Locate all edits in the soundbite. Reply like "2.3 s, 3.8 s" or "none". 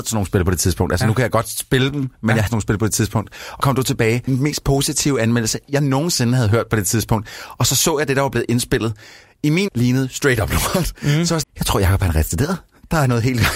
2.5 s, 3.6 s, 4.3 s, 9.2 s, 9.7 s, 11.4 s